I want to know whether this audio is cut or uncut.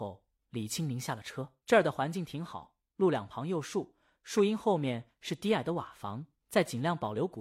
cut